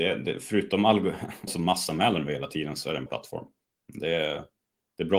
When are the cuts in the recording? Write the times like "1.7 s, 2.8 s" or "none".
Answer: 1.5 s, 3.1 s